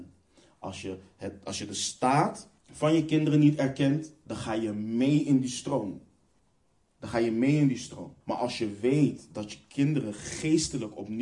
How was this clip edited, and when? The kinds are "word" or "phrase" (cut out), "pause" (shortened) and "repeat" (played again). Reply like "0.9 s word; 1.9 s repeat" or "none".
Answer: 2.6 s pause; 6.4 s pause; 8.2 s pause